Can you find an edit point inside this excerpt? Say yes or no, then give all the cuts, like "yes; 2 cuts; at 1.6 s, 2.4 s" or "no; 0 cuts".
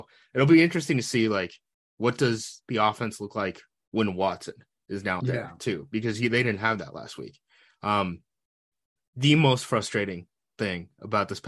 yes; 1 cut; at 5.2 s